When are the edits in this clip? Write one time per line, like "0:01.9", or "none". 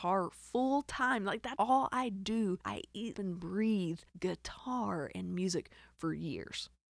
0:01.6
0:02.6
0:03.1
0:04.1